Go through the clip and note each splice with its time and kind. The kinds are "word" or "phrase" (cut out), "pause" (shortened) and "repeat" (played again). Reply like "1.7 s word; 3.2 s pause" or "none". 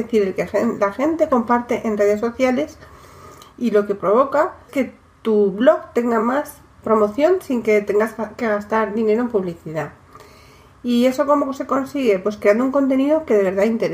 4.7 s word; 6.2 s word; 6.8 s word